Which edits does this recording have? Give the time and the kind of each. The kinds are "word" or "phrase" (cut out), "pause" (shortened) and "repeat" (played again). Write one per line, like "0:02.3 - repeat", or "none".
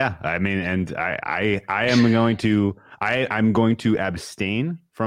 none